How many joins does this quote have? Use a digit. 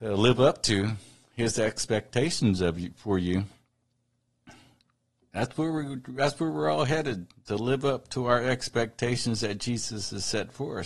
0